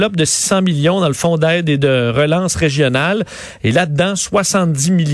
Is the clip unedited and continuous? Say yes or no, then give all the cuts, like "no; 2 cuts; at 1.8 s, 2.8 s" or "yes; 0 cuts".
yes; 0 cuts